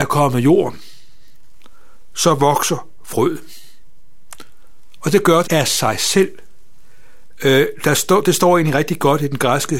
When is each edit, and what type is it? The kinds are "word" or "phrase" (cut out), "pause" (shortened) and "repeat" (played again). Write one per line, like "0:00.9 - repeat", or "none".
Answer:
0:05.4 - word